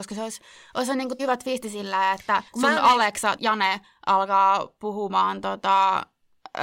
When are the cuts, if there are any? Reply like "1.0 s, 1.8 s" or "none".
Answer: 1.2 s, 2.5 s, 3.4 s

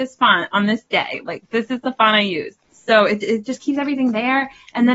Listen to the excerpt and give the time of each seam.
2.6 s

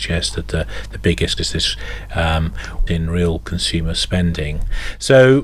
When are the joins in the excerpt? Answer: 1.4 s, 2.9 s

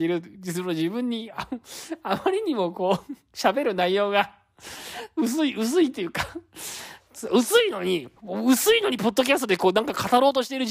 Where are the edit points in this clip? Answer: 8.2 s

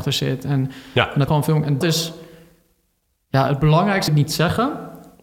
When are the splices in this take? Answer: 1.3 s, 1.8 s, 4.1 s

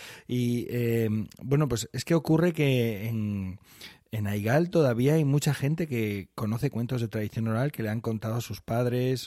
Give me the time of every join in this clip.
none

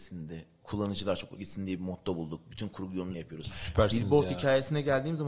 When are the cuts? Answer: 1.4 s, 3.1 s

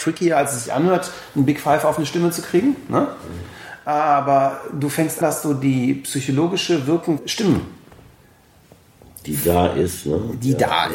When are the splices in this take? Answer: 5.2 s, 7.2 s

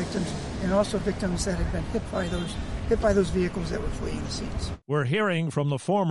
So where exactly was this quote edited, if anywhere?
none

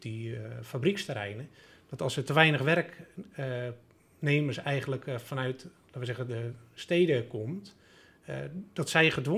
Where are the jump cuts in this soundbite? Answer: none

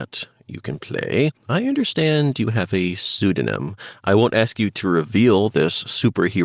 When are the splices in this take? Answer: 1.4 s

